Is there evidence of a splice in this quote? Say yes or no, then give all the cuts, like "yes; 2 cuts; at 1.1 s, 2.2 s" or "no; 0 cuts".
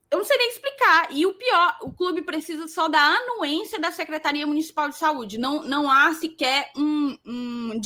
no; 0 cuts